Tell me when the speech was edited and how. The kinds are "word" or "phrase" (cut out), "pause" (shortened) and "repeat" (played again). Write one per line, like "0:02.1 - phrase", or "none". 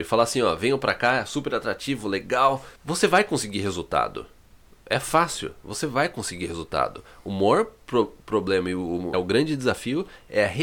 0:02.8 - pause
0:09.1 - word